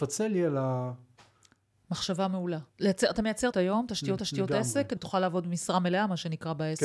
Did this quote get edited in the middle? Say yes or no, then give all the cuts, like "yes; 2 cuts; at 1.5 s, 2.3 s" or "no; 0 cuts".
yes; 4 cuts; at 2.7 s, 3.5 s, 4.2 s, 5.0 s